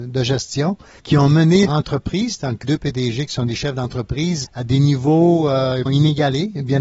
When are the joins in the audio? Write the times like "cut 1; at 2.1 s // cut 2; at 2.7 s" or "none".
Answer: cut 1; at 1.0 s // cut 2; at 1.7 s // cut 3; at 2.6 s // cut 4; at 4.4 s // cut 5; at 5.9 s